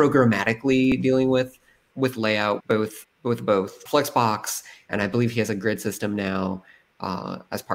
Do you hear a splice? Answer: yes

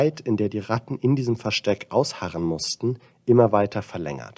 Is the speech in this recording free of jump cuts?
yes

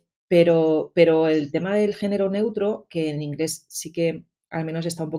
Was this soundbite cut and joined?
no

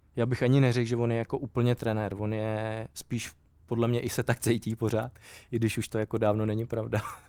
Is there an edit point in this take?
yes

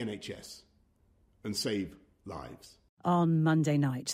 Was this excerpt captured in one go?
yes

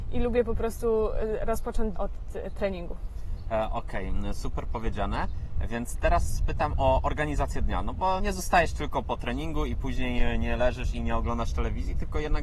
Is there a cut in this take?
yes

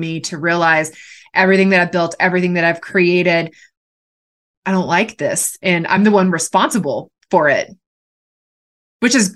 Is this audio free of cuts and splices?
yes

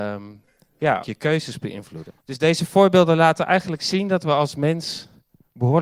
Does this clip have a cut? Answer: yes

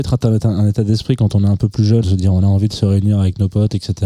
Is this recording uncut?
no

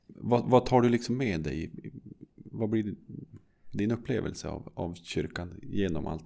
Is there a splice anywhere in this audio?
no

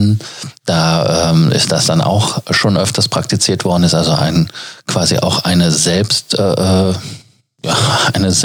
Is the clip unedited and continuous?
yes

